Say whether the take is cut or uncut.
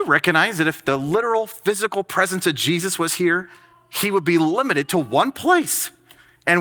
uncut